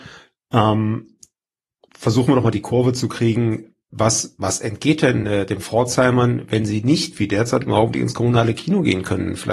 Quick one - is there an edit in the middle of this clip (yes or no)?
no